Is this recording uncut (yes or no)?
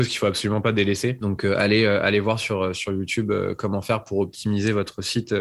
yes